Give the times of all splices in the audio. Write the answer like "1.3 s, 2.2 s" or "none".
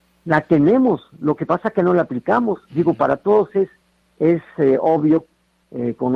none